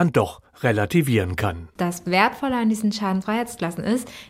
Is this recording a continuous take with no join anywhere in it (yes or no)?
yes